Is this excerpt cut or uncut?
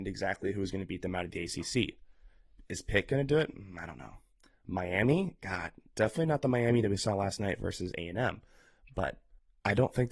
uncut